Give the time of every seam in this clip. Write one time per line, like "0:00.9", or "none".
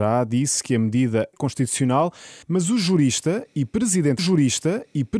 0:01.3
0:02.4
0:04.2